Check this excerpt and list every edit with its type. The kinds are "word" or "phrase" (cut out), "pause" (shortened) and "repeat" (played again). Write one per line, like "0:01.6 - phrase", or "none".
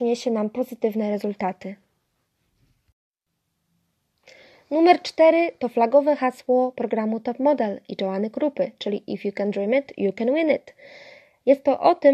none